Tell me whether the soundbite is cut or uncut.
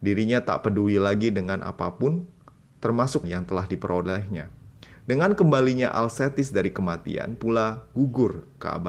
cut